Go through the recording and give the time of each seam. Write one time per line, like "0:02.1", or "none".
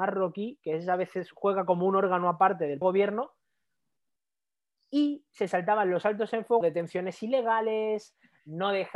0:02.8
0:06.6